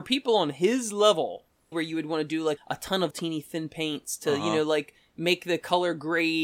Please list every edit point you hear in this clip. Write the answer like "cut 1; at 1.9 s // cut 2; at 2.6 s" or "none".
cut 1; at 1.7 s // cut 2; at 2.6 s // cut 3; at 3.1 s